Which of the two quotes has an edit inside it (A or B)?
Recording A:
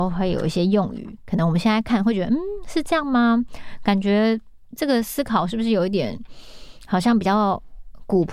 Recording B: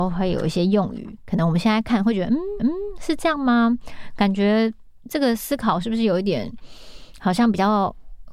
B